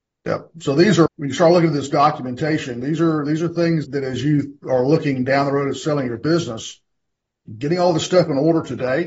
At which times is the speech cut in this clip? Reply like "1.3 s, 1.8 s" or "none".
1.1 s, 3.8 s

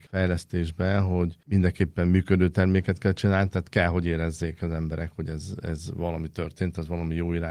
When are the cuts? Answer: none

